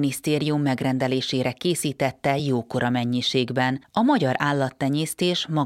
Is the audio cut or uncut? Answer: uncut